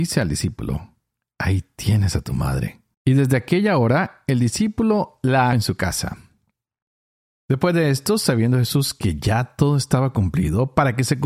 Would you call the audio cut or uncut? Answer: cut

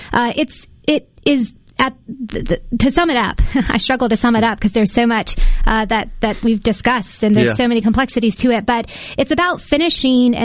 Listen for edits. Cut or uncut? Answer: uncut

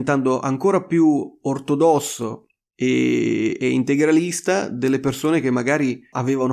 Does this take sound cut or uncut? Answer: uncut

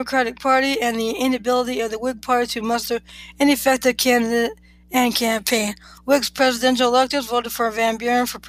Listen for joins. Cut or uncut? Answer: uncut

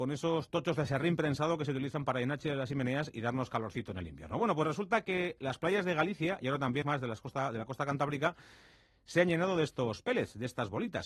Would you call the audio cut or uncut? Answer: cut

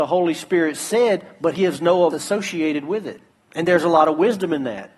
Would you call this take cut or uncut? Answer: cut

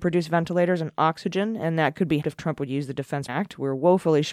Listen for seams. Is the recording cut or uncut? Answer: cut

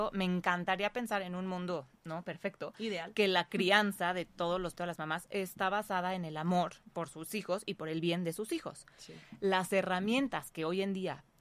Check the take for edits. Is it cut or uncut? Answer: cut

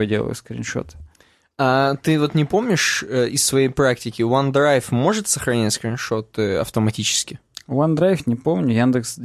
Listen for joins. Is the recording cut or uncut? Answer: uncut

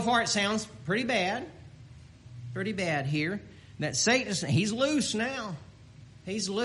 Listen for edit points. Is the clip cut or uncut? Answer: uncut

